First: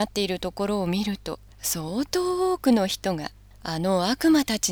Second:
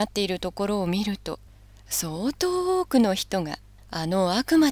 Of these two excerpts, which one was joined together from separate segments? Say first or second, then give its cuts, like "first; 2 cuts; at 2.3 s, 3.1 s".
first; 1 cut; at 1.5 s